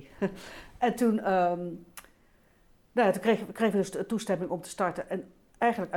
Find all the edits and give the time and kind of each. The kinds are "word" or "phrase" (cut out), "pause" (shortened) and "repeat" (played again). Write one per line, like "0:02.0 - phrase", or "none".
none